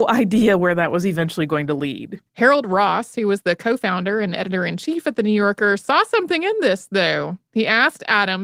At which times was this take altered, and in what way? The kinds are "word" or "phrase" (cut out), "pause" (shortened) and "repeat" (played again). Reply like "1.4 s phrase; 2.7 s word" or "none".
2.3 s pause